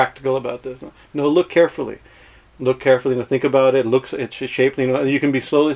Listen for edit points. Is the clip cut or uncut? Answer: uncut